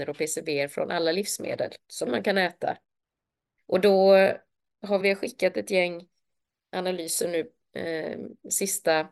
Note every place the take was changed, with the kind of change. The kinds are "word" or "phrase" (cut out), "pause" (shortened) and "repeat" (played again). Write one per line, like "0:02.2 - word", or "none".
none